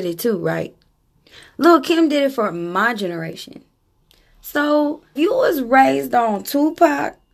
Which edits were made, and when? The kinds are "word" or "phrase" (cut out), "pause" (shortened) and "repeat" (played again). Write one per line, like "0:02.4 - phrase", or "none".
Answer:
0:05.2 - word